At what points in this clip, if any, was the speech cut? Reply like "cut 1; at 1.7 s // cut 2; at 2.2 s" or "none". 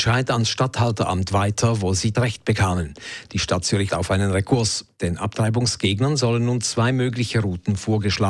cut 1; at 2.1 s // cut 2; at 3.9 s